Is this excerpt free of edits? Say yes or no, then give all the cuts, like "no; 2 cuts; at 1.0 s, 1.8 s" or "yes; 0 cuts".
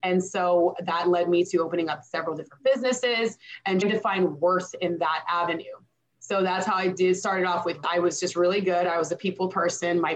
no; 2 cuts; at 3.8 s, 7.8 s